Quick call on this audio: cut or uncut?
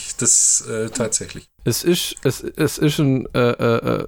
uncut